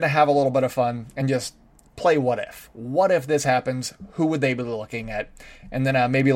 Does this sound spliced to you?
no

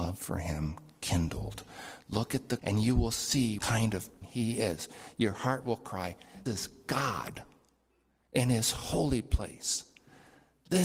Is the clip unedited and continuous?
no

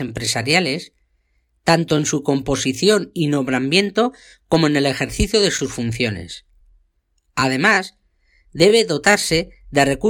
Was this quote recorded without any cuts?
yes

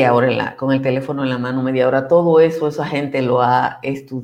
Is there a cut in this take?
no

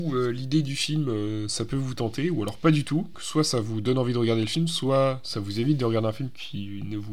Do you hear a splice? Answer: yes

